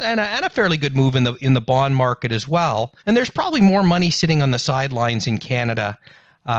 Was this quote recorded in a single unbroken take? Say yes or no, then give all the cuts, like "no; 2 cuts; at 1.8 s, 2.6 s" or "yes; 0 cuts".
no; 1 cut; at 3.0 s